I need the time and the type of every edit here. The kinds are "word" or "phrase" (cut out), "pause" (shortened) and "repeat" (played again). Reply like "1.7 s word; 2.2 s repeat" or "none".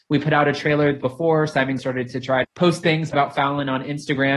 1.0 s word; 1.8 s word; 2.4 s word; 3.1 s word

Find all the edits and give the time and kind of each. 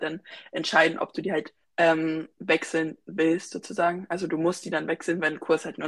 1.6 s pause

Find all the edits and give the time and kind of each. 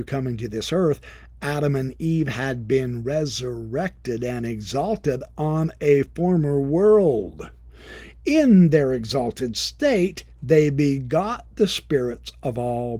none

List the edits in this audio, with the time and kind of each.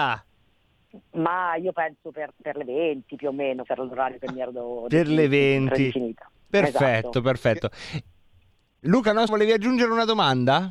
2.3 s word; 3.7 s word; 9.3 s word

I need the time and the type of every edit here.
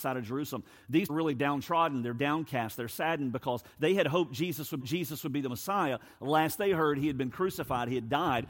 1.1 s phrase; 4.8 s repeat

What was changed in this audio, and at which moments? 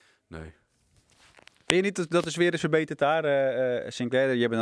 none

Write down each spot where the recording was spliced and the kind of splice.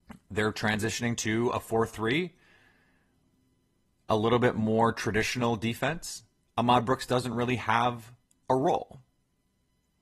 none

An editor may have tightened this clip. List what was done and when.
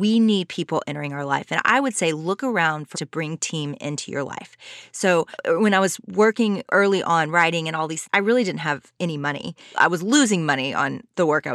2.9 s word; 8.1 s word

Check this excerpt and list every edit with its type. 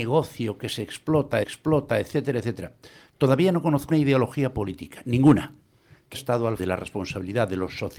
1.4 s repeat; 3.9 s word; 6.1 s word; 6.6 s word

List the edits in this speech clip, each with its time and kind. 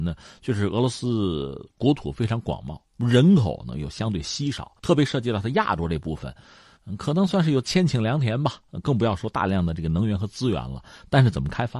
2.8 s pause; 4.8 s pause

